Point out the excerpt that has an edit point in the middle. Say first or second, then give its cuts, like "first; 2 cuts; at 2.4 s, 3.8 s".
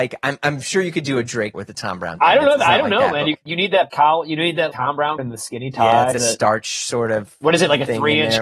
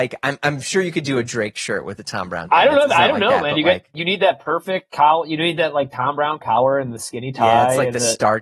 first; 6 cuts; at 1.5 s, 3.3 s, 3.9 s, 4.7 s, 5.2 s, 6.1 s